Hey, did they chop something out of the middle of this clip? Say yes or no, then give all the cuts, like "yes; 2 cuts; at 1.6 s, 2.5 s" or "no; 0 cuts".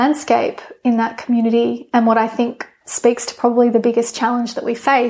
no; 0 cuts